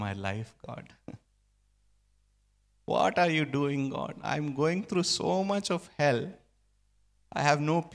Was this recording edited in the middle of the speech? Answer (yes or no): no